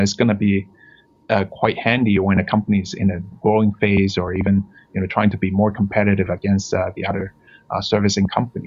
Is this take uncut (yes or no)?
yes